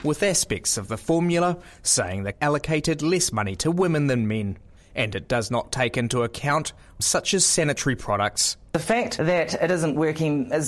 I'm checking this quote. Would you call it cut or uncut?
cut